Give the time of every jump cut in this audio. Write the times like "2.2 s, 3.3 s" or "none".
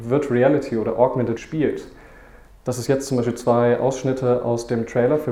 1.4 s